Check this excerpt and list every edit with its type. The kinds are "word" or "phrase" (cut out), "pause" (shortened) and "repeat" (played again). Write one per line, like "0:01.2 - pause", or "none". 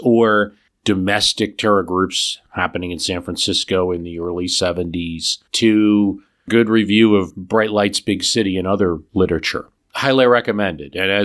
0:05.5 - pause